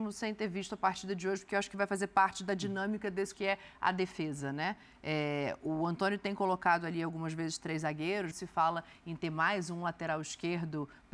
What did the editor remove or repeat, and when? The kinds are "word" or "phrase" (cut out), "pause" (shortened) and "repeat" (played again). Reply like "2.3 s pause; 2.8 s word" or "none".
3.3 s word; 8.3 s word

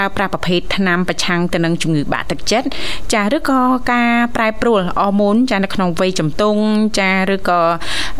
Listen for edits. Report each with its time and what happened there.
none

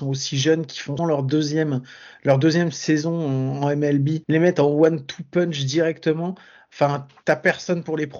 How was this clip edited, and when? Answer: 1.0 s word; 4.2 s pause

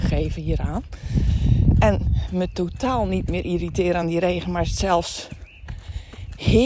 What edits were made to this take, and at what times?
none

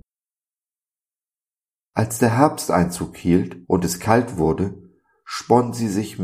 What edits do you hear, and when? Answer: 3.6 s pause

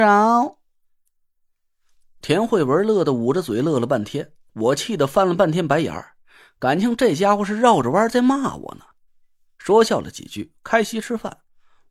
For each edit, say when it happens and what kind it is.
9.1 s pause

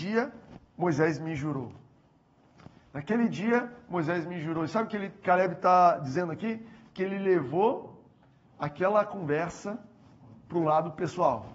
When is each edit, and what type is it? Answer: none

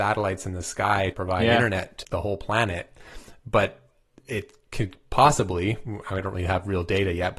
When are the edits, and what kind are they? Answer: 1.1 s word; 2.0 s word

